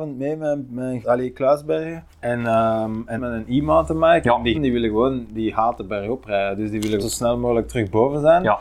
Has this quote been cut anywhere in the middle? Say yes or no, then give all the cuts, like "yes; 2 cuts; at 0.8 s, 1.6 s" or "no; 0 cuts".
yes; 5 cuts; at 1.0 s, 2.1 s, 3.2 s, 4.5 s, 7.0 s